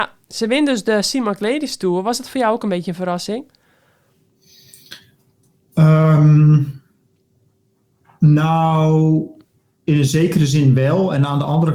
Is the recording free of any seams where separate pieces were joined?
yes; 0 cuts

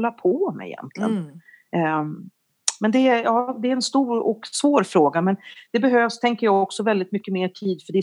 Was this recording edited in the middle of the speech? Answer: no; 0 cuts

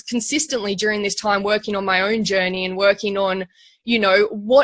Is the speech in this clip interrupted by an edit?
no; 0 cuts

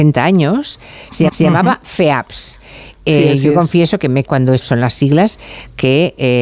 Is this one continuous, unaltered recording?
no; 3 cuts; at 1.3 s, 4.2 s, 4.6 s

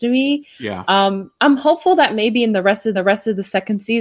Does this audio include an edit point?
yes; 2 cuts; at 1.4 s, 2.9 s

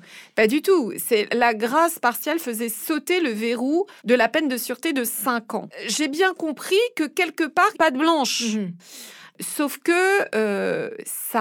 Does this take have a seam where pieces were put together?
yes; 3 cuts; at 1.3 s, 4.0 s, 7.7 s

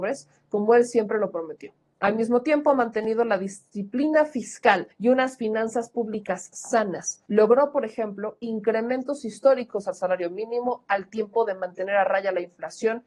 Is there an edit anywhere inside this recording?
yes; 2 cuts; at 4.9 s, 7.3 s

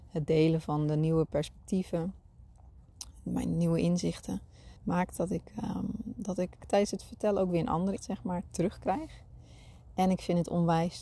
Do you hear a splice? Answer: yes; 3 cuts; at 4.8 s, 6.6 s, 8.0 s

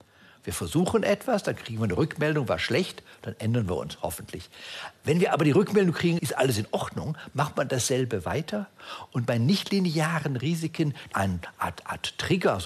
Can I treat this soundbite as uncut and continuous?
no; 2 cuts; at 6.2 s, 11.1 s

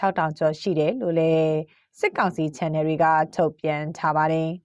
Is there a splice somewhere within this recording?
no; 0 cuts

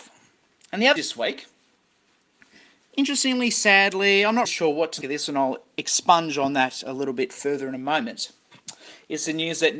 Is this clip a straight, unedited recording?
no; 3 cuts; at 1.0 s, 4.4 s, 5.0 s

